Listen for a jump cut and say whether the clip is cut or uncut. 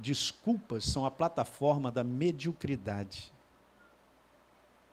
uncut